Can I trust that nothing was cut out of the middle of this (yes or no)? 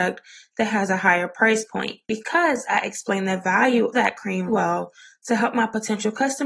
no